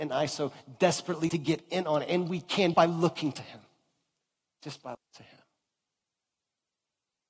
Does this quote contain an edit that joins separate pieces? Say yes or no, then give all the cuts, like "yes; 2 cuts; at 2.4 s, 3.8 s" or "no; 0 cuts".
yes; 3 cuts; at 1.3 s, 2.7 s, 4.9 s